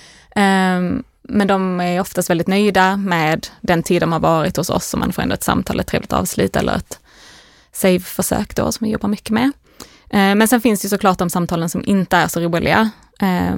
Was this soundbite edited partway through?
yes; 1 cut; at 5.4 s

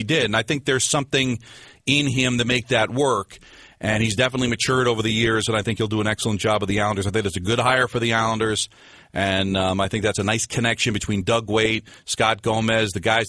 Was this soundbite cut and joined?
no; 0 cuts

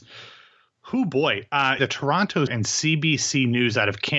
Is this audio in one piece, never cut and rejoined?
no; 2 cuts; at 1.8 s, 2.5 s

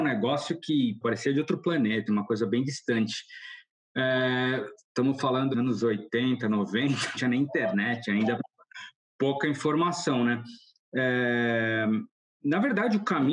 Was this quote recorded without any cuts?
no; 4 cuts; at 1.0 s, 2.1 s, 5.5 s, 7.1 s

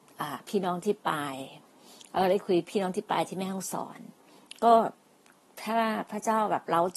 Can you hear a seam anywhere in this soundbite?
no; 0 cuts

